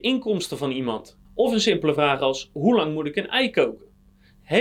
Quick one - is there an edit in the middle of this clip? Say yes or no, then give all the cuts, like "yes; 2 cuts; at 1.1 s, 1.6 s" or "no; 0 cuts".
yes; 1 cut; at 1.3 s